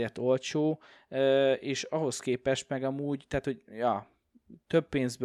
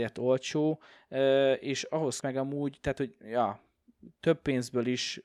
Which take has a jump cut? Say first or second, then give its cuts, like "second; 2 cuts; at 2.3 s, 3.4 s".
second; 1 cut; at 2.2 s